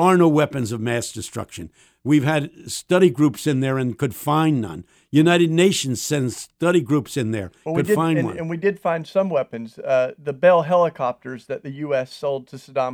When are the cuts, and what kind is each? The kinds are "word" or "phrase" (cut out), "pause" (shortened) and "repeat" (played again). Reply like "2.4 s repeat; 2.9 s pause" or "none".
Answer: none